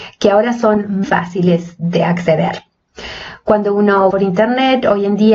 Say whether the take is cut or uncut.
cut